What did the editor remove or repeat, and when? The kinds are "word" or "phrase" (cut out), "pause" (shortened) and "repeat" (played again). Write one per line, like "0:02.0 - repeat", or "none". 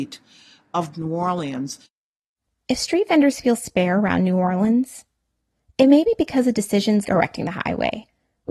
0:00.9 - word
0:07.0 - word